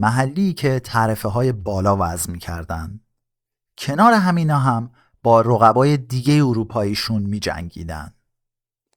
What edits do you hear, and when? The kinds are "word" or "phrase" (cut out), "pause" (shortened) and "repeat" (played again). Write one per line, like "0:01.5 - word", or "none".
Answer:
none